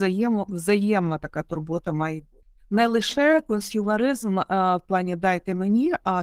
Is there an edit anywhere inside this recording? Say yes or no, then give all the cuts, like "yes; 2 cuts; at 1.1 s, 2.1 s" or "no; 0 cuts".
yes; 1 cut; at 2.4 s